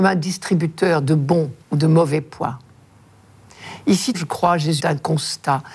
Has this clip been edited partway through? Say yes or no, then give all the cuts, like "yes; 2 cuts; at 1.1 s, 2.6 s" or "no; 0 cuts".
yes; 3 cuts; at 1.6 s, 4.1 s, 4.8 s